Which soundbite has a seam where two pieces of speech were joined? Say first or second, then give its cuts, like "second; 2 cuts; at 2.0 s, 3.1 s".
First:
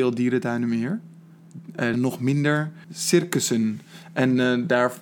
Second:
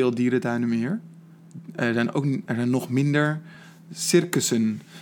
first; 2 cuts; at 1.9 s, 2.8 s